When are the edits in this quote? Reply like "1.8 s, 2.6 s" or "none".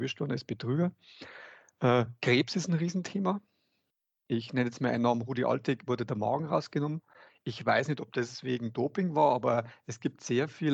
none

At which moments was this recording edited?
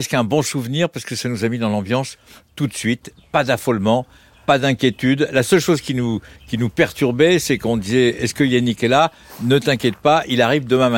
6.3 s

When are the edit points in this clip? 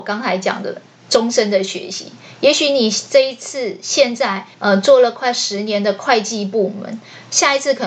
4.5 s

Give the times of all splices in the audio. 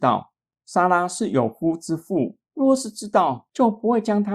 2.4 s

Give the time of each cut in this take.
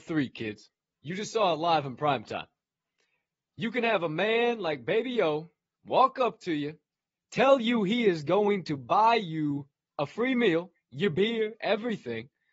none

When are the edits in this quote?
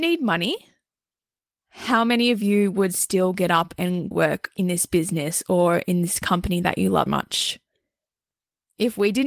4.1 s, 7.1 s

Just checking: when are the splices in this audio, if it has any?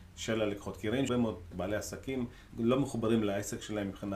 1.1 s, 1.5 s, 2.5 s

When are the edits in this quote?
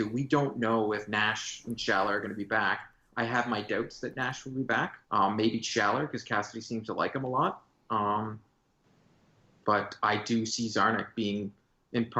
5.0 s

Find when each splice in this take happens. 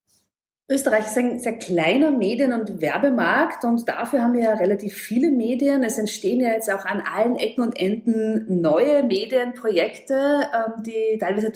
none

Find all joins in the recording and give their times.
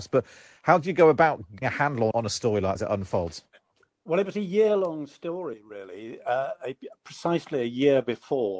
1.6 s, 2.1 s, 2.8 s

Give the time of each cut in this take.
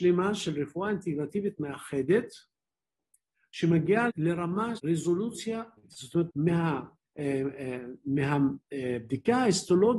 4.1 s, 4.8 s, 5.8 s, 6.3 s

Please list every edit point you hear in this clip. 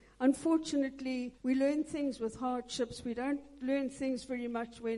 1.4 s

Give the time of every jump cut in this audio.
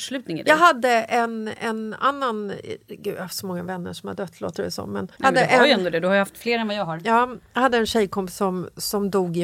5.2 s

